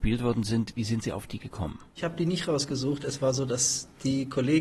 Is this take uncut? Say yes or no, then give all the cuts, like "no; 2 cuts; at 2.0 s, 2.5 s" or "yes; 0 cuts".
no; 1 cut; at 1.9 s